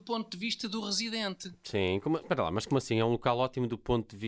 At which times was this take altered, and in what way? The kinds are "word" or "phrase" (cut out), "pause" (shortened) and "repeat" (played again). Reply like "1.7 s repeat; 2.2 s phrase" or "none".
2.2 s word